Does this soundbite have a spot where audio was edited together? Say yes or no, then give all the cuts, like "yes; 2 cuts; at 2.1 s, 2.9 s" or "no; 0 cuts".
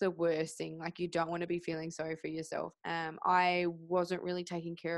yes; 1 cut; at 2.8 s